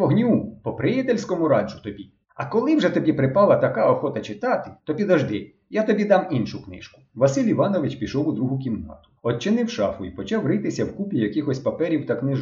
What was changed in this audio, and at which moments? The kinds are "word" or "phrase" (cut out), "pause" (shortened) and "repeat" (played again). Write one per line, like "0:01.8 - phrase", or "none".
0:02.2 - pause
0:04.8 - pause
0:07.1 - pause
0:09.2 - pause